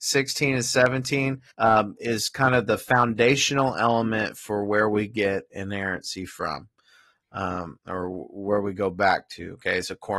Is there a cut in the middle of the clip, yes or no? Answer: yes